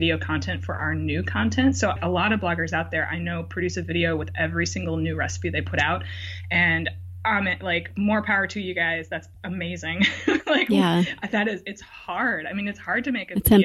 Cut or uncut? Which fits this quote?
uncut